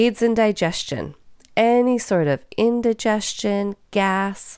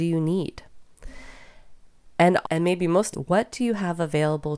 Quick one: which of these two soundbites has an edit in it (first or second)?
second